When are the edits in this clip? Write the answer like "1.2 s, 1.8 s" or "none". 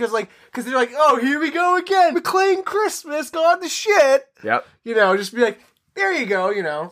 2.1 s